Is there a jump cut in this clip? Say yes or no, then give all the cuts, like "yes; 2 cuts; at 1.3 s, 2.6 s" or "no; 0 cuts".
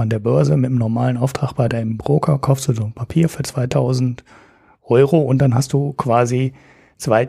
no; 0 cuts